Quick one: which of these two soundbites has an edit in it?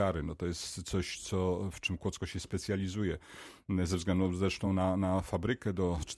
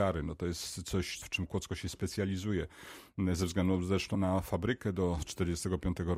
second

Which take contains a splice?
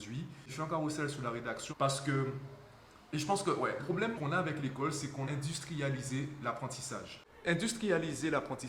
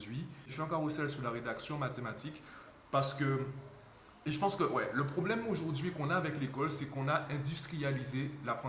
first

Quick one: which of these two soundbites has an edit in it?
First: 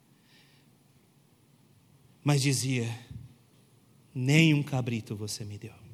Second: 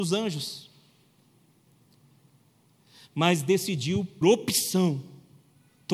second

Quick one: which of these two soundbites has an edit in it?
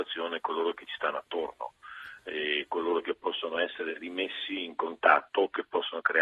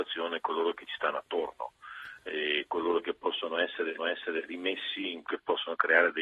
second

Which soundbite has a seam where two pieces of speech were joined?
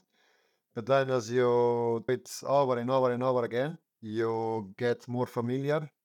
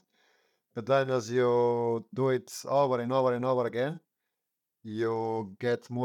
first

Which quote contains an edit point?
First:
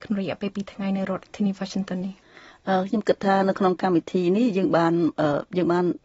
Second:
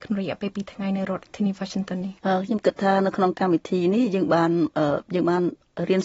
second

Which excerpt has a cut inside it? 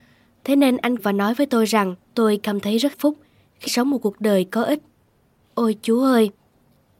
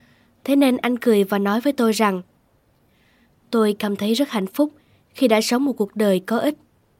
first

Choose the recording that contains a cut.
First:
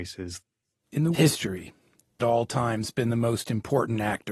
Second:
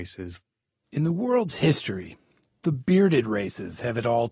first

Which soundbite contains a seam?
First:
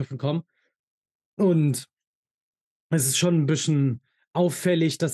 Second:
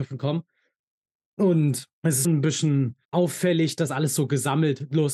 second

